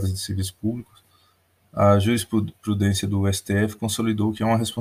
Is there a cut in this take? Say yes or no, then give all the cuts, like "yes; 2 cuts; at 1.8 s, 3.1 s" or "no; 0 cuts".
no; 0 cuts